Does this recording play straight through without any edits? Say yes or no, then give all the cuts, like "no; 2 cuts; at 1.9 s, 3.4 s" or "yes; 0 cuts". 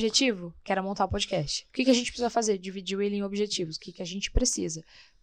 no; 1 cut; at 1.7 s